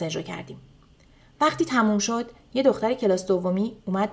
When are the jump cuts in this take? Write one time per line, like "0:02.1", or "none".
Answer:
none

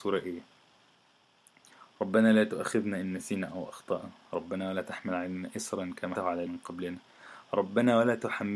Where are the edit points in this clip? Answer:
0:06.2
0:06.5

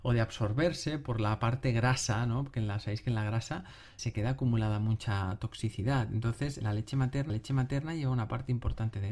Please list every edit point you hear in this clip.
0:04.0
0:06.6
0:07.3

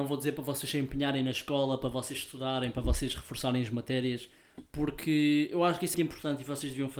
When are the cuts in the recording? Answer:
0:05.9

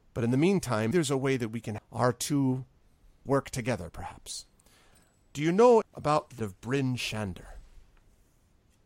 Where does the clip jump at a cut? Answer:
0:00.9
0:01.8
0:03.3
0:05.8
0:06.4

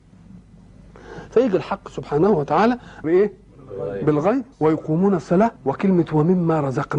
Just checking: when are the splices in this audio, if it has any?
0:03.0
0:04.5
0:05.6

